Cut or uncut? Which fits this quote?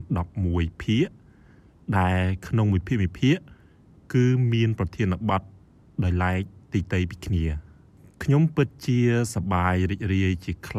uncut